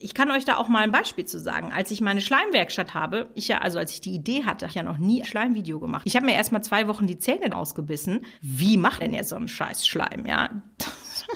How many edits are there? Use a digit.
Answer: 7